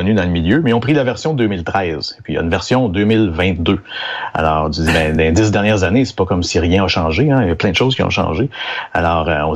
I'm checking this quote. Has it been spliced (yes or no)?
no